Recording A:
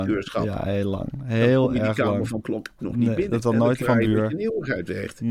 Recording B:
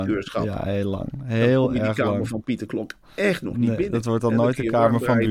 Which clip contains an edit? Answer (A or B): A